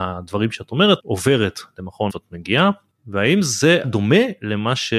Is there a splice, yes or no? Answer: yes